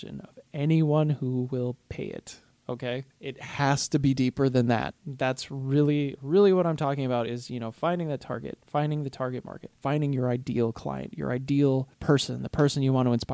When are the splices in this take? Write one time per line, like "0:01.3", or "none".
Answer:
0:03.1
0:05.0
0:09.8
0:11.9